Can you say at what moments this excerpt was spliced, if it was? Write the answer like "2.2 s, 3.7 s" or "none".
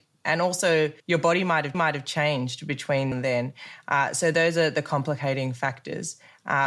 1.0 s, 1.7 s, 3.1 s